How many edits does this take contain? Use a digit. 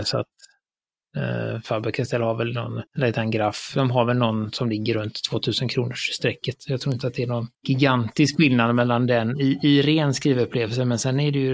2